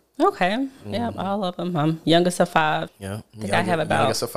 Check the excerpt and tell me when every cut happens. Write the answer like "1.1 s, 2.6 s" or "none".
2.9 s